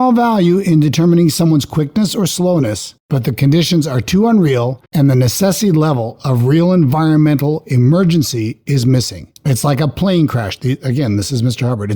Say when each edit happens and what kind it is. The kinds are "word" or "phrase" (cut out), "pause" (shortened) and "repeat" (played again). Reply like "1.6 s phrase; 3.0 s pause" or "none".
3.0 s pause; 4.9 s pause